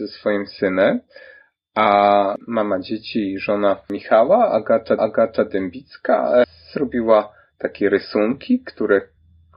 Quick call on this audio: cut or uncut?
cut